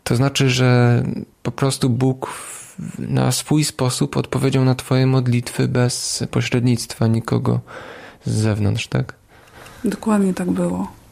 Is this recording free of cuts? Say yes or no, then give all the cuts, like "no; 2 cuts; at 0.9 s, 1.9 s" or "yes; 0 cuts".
yes; 0 cuts